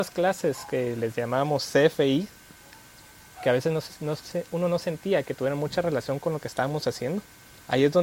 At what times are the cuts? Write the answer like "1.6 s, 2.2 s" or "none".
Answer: none